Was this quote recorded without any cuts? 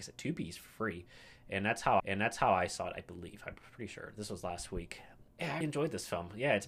no; 3 cuts; at 2.0 s, 5.3 s, 5.6 s

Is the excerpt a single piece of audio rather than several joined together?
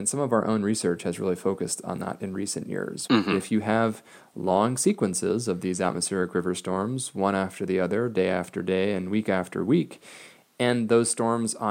yes; 0 cuts

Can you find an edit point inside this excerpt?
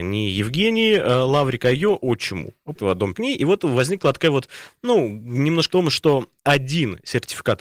yes; 4 cuts; at 2.8 s, 3.1 s, 5.7 s, 6.4 s

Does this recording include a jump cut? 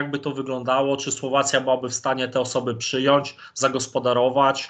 no; 0 cuts

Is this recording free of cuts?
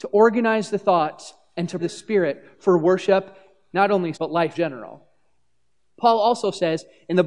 no; 4 cuts; at 1.8 s, 3.7 s, 4.1 s, 4.5 s

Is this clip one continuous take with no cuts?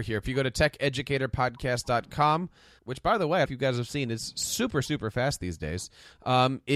no; 2 cuts; at 2.8 s, 3.5 s

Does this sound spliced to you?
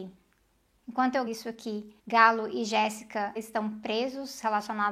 yes; 3 cuts; at 1.3 s, 2.0 s, 3.4 s

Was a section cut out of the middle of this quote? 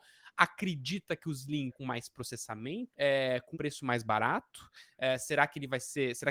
yes; 3 cuts; at 1.7 s, 2.9 s, 3.5 s

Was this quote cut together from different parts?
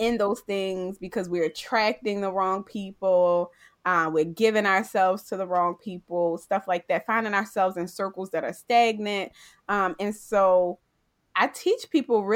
no; 0 cuts

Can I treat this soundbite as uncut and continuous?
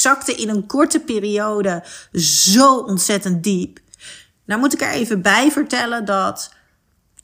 yes; 0 cuts

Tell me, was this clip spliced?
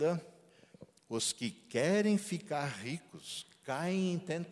no; 0 cuts

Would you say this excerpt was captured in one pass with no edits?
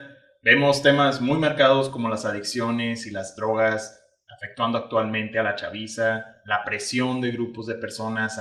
yes; 0 cuts

